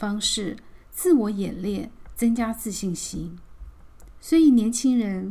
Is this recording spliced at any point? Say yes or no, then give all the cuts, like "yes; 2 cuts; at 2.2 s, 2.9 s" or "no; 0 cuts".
no; 0 cuts